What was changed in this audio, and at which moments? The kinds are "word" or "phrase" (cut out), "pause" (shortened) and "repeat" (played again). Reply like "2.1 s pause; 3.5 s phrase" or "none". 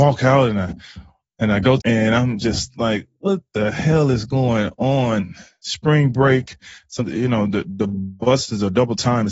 1.8 s phrase; 7.0 s word